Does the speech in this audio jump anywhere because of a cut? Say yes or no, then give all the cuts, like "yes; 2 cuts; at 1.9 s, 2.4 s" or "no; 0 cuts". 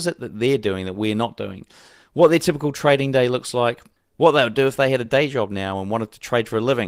no; 0 cuts